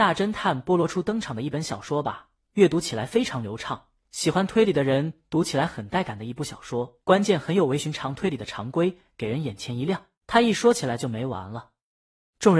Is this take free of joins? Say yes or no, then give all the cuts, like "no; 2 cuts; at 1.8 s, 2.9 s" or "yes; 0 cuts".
no; 2 cuts; at 7.0 s, 10.2 s